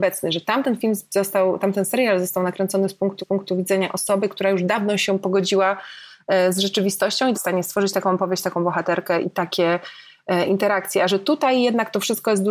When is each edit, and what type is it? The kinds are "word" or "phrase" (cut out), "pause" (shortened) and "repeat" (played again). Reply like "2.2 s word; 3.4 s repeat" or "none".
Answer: 3.2 s repeat; 7.3 s phrase; 9.2 s word